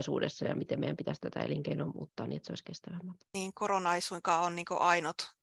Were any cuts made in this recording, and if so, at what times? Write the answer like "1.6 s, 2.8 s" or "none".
3.3 s